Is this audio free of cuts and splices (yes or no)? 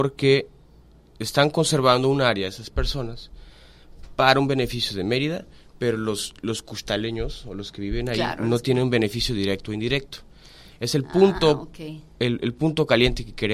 yes